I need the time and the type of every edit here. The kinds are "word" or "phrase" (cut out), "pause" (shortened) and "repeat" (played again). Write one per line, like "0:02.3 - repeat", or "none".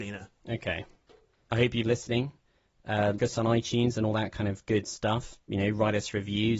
0:01.8 - word
0:03.2 - word